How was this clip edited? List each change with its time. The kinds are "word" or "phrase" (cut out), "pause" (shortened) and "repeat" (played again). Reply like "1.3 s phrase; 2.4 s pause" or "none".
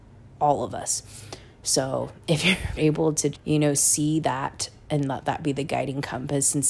2.2 s pause; 2.8 s word; 3.3 s word